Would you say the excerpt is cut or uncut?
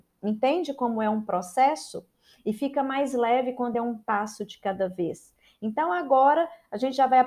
uncut